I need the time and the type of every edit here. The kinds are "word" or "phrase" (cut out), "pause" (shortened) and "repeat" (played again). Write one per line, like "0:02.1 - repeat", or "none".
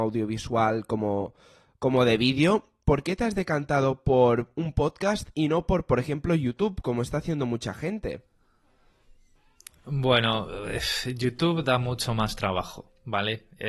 none